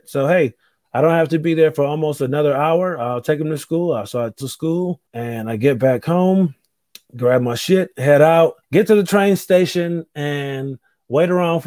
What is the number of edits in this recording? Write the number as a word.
four